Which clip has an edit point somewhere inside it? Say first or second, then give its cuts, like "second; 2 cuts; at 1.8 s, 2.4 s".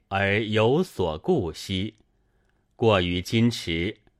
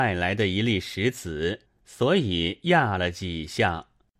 second; 1 cut; at 1.6 s